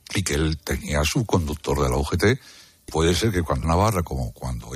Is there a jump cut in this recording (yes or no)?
yes